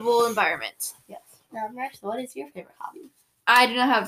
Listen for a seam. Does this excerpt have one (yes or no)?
no